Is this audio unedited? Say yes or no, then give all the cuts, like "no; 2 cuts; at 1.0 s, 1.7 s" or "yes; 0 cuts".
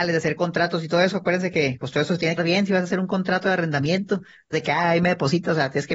no; 2 cuts; at 2.4 s, 4.5 s